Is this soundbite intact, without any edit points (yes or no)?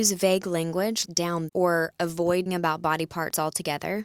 no